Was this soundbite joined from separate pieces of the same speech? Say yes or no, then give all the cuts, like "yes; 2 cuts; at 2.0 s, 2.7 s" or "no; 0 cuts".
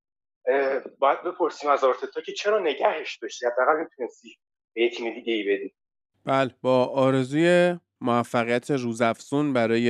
no; 0 cuts